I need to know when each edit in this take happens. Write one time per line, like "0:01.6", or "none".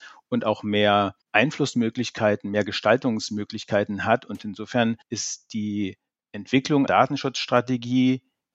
0:01.2
0:05.0
0:06.9